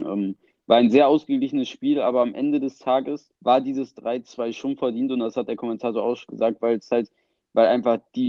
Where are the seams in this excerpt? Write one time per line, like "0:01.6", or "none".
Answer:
0:03.4